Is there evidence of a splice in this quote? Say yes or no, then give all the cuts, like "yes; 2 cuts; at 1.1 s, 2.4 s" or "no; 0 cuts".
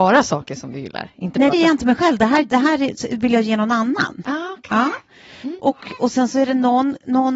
yes; 1 cut; at 1.5 s